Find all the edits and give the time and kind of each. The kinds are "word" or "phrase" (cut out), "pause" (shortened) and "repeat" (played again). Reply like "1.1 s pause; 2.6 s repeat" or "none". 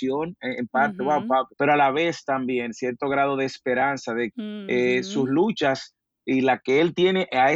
1.5 s pause; 4.3 s word